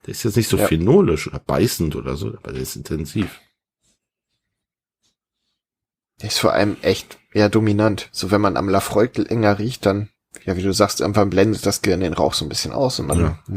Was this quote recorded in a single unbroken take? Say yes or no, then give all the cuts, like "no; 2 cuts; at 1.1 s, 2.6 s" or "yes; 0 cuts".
yes; 0 cuts